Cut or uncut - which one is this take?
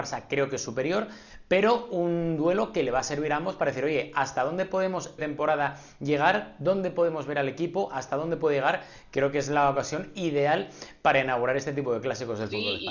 cut